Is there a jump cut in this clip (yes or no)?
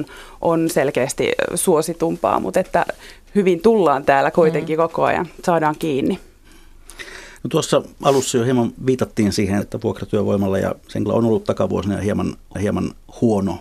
yes